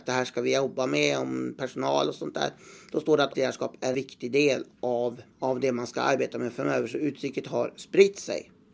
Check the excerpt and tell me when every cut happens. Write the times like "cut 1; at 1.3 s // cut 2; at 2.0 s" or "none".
cut 1; at 3.3 s // cut 2; at 3.9 s // cut 3; at 5.3 s

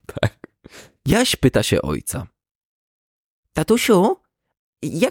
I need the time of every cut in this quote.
none

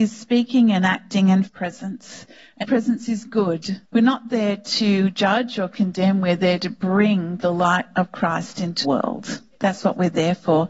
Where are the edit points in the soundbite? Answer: cut 1; at 1.5 s // cut 2; at 2.6 s // cut 3; at 3.8 s // cut 4; at 8.8 s

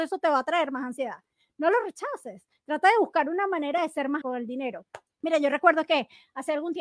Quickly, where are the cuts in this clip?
cut 1; at 4.2 s // cut 2; at 5.1 s

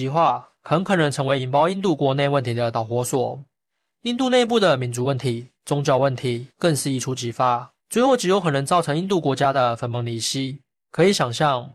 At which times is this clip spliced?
cut 1; at 5.6 s // cut 2; at 6.5 s // cut 3; at 7.8 s

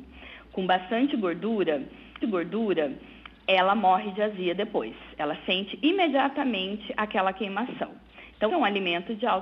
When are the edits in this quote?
cut 1; at 2.2 s // cut 2; at 8.5 s

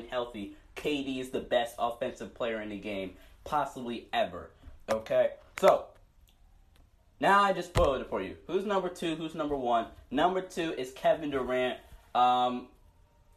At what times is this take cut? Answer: none

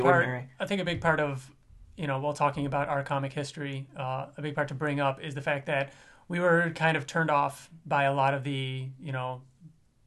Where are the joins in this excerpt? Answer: none

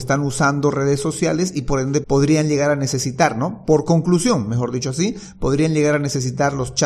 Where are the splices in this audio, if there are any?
cut 1; at 2.0 s

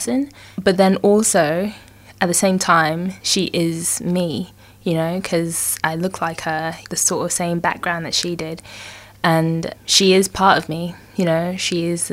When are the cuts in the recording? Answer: cut 1; at 3.2 s // cut 2; at 5.8 s // cut 3; at 6.8 s

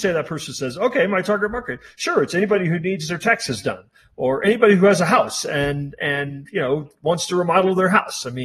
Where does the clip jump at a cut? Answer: none

